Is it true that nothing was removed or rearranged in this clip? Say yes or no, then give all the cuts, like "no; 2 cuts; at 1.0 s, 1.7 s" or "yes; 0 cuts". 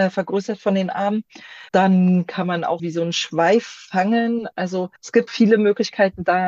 no; 4 cuts; at 1.7 s, 2.8 s, 5.0 s, 5.3 s